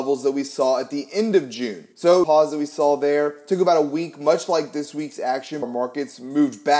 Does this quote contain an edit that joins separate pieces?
yes; 3 cuts; at 1.9 s, 2.2 s, 5.6 s

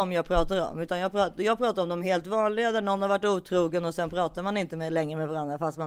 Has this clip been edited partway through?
no; 0 cuts

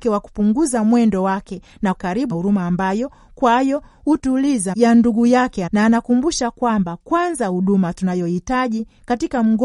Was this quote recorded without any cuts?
no; 4 cuts; at 1.9 s, 2.3 s, 4.7 s, 5.7 s

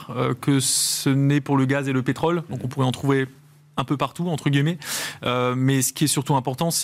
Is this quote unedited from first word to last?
yes; 0 cuts

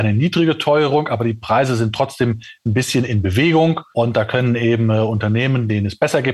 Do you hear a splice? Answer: no; 0 cuts

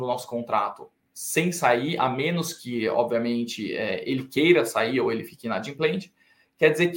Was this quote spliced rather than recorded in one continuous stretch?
no; 0 cuts

